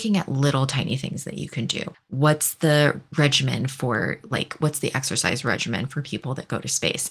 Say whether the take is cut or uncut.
uncut